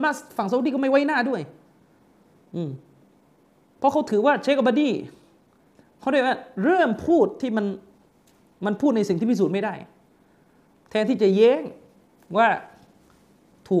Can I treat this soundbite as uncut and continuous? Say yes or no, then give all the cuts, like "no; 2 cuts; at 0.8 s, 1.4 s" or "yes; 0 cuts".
yes; 0 cuts